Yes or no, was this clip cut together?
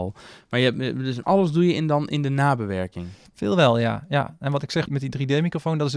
yes